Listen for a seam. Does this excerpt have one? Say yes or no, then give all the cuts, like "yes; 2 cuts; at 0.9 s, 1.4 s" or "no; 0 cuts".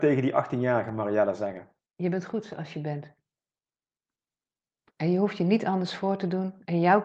no; 0 cuts